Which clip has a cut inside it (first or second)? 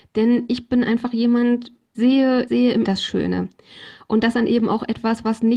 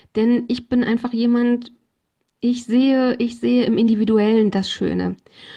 first